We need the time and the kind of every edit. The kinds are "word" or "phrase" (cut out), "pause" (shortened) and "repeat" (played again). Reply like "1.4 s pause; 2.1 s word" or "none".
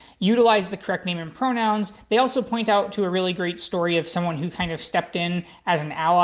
none